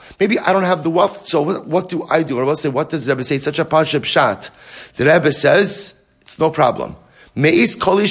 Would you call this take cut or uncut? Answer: uncut